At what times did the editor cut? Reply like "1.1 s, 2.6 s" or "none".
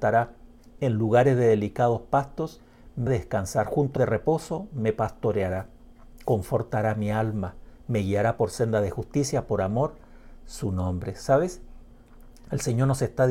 3.1 s, 4.0 s, 10.4 s